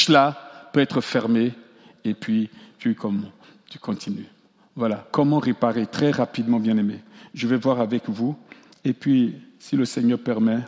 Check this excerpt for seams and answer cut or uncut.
uncut